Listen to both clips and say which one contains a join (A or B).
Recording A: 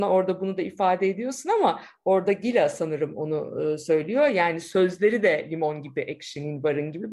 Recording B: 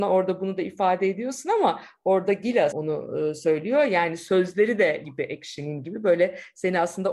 B